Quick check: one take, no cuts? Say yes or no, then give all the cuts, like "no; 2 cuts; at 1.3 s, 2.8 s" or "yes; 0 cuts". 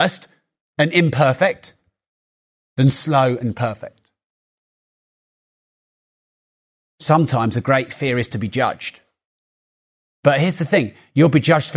yes; 0 cuts